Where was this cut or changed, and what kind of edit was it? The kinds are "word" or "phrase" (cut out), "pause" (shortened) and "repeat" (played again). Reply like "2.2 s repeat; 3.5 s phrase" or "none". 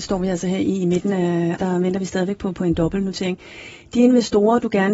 1.6 s word; 2.5 s word